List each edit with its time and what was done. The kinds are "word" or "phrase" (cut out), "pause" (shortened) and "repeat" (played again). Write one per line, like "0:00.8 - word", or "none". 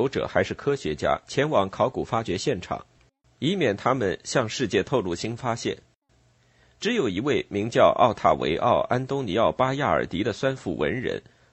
none